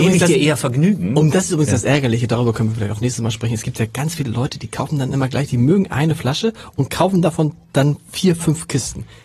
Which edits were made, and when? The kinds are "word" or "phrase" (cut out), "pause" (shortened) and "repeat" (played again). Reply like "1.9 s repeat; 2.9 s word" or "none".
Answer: none